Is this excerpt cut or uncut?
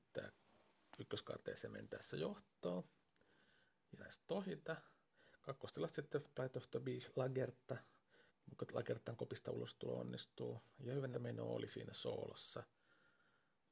cut